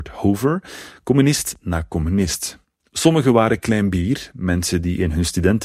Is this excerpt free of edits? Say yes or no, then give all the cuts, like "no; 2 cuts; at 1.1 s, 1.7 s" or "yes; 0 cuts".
yes; 0 cuts